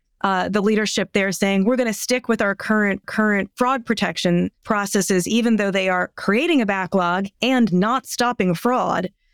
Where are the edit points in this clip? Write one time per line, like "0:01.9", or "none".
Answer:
0:03.0
0:04.6
0:07.3